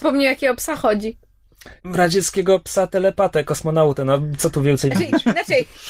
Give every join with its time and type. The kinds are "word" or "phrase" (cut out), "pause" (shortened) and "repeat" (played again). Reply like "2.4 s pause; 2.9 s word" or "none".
1.8 s pause

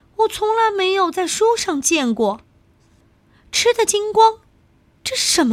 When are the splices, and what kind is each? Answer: none

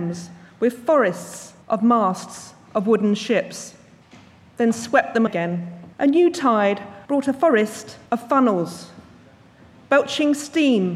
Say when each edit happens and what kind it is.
1.6 s pause; 4.0 s pause; 5.3 s word; 5.9 s pause; 7.0 s pause; 8.0 s pause

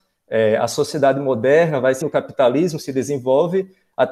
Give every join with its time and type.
2.0 s word

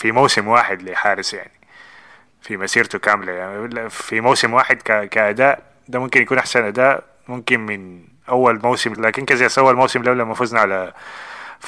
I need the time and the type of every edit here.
8.9 s word

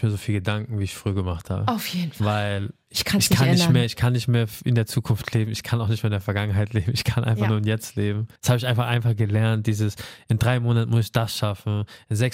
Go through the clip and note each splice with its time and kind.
8.4 s pause

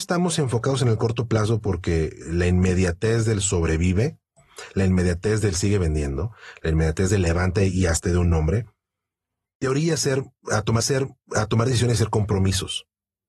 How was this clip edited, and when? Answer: 10.8 s repeat

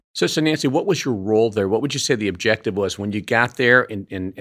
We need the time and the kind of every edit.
none

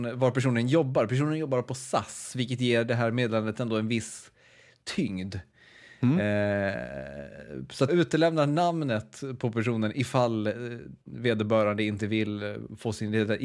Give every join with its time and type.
7.9 s word

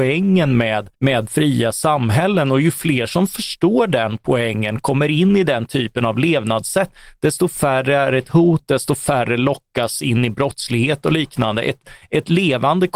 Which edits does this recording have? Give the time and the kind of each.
0.9 s pause

